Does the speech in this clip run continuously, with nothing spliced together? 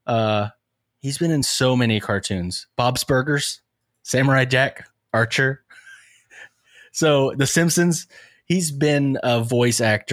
yes; 0 cuts

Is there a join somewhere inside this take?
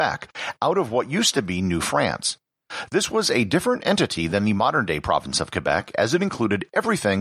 no; 0 cuts

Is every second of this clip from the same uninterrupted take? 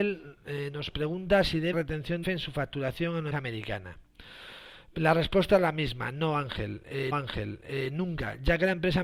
no; 4 cuts; at 1.7 s, 2.2 s, 3.3 s, 7.1 s

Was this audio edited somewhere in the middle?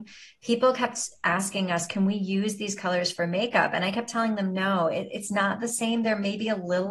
no; 0 cuts

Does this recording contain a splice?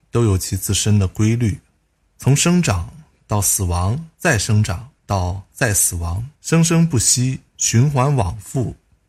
yes; 5 cuts; at 2.0 s, 4.1 s, 5.0 s, 6.4 s, 7.5 s

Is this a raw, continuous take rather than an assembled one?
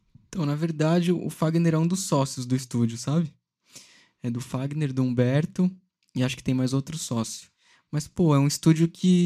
yes; 0 cuts

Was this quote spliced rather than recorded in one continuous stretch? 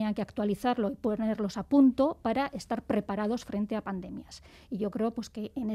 no; 0 cuts

